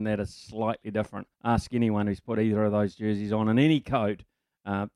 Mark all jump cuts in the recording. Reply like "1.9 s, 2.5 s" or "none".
1.3 s